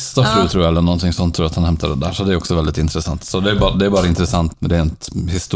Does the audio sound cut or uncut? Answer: cut